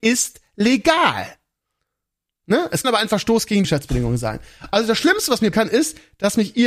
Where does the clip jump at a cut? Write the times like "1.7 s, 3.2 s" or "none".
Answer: 2.8 s, 3.6 s, 5.5 s

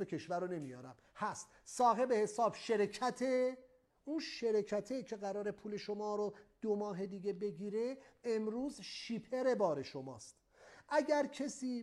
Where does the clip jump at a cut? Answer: none

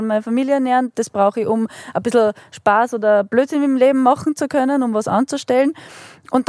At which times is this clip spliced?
none

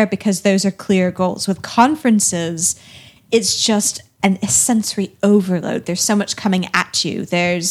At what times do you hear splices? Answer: none

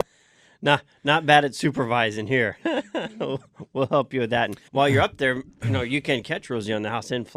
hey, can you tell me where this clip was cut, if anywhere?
4.7 s

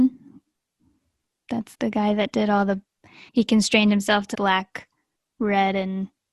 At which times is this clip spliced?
1.7 s, 3.3 s, 4.3 s

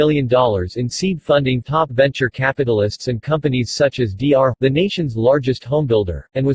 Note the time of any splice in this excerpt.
1.6 s, 4.5 s

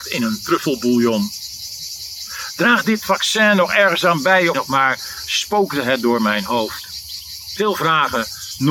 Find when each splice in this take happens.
4.5 s

